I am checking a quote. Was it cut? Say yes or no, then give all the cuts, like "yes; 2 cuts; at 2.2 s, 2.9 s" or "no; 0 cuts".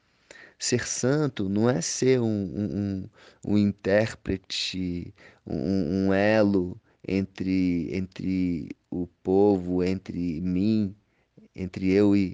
no; 0 cuts